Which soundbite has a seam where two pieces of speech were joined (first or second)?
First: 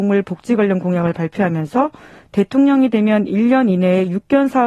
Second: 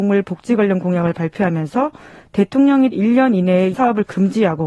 second